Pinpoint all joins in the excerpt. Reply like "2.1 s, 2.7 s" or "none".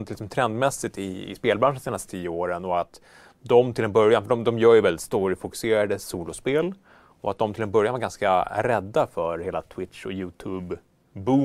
none